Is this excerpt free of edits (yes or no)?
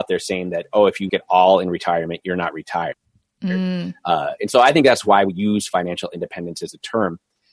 no